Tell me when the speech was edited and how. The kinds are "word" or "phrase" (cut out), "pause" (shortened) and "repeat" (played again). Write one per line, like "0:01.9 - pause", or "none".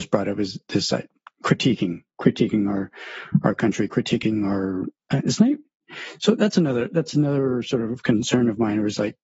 none